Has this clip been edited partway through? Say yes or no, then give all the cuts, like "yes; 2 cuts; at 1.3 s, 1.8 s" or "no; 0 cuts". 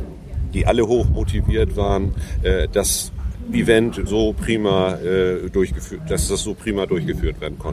yes; 1 cut; at 4.1 s